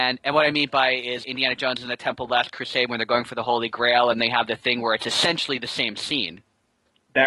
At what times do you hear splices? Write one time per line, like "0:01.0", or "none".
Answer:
0:01.2